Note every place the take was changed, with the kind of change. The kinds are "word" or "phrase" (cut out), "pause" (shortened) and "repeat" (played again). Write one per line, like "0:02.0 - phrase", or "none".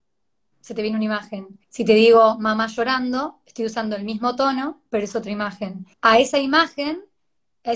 0:01.6 - pause
0:05.9 - pause